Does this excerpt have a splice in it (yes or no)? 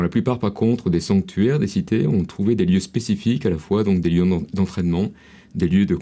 no